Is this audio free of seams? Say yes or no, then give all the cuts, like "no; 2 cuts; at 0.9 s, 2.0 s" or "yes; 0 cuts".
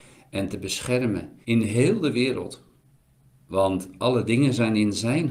no; 2 cuts; at 1.4 s, 3.0 s